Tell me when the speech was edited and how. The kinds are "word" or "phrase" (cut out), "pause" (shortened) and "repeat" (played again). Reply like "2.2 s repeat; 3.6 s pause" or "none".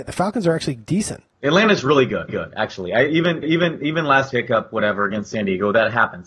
1.3 s pause; 2.3 s repeat; 3.4 s repeat; 4.3 s word